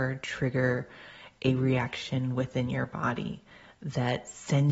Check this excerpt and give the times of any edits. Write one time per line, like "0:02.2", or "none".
none